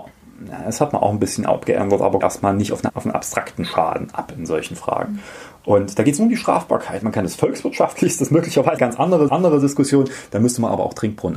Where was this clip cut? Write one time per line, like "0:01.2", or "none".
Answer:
0:02.2
0:02.9
0:08.8
0:09.3